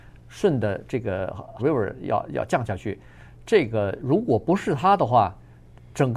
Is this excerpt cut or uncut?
cut